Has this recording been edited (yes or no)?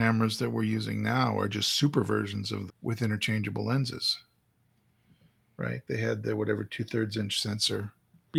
yes